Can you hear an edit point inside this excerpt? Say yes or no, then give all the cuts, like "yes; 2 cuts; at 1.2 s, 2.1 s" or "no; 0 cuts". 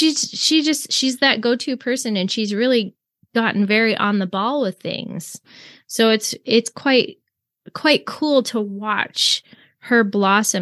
no; 0 cuts